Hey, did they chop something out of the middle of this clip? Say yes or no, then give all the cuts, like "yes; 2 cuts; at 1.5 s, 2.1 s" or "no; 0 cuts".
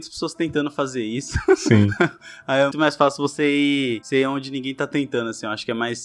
yes; 1 cut; at 2.7 s